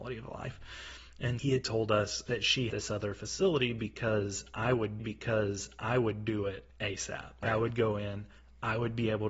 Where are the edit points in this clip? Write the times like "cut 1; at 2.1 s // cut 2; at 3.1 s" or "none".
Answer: cut 1; at 1.4 s // cut 2; at 2.3 s // cut 3; at 2.7 s // cut 4; at 5.0 s